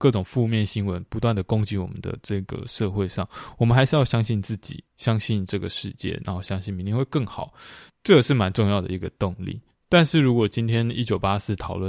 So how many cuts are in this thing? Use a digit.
3